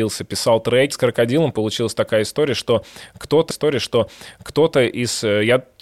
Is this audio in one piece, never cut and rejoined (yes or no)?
no